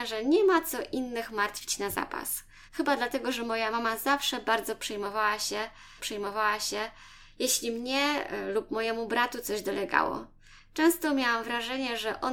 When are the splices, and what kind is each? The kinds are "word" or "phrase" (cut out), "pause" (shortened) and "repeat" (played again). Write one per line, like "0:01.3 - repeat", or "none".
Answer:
0:02.7 - pause
0:06.0 - repeat